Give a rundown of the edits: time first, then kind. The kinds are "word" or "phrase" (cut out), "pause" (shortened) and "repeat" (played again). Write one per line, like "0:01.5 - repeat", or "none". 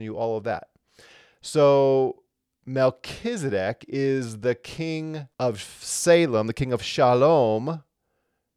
0:05.3 - pause